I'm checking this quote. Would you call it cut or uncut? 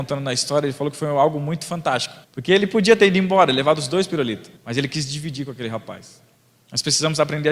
cut